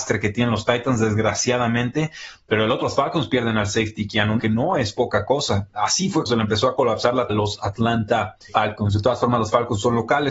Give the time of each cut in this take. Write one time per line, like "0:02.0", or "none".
0:02.8
0:04.4
0:06.3
0:07.3
0:08.5